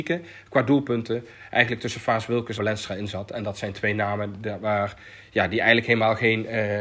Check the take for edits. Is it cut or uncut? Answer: cut